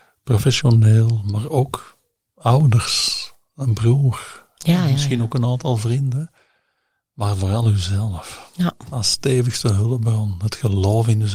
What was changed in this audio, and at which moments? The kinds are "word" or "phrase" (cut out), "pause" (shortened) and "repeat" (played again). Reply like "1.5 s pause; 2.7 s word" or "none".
none